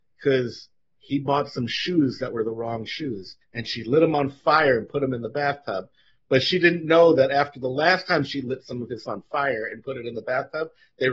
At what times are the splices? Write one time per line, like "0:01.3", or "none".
0:03.4
0:09.1